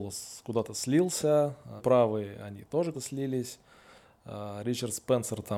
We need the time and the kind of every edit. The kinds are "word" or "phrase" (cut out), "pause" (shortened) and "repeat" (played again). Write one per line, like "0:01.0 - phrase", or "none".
0:01.8 - word
0:02.9 - word